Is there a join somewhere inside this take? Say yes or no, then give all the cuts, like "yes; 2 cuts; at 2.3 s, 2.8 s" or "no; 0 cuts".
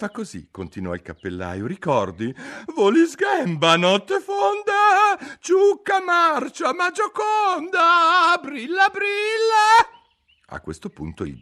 no; 0 cuts